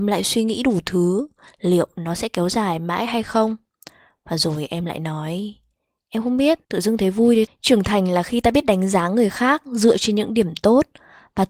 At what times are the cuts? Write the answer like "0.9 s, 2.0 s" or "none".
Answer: 6.6 s, 7.5 s